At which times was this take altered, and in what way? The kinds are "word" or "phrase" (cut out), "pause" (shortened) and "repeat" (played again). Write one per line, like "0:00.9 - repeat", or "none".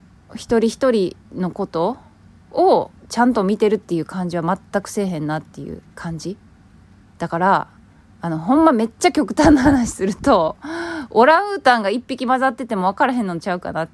0:01.2 - pause
0:03.0 - pause
0:05.9 - pause
0:08.0 - pause